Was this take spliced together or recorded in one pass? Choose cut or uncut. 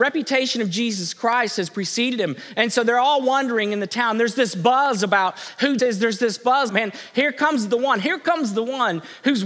cut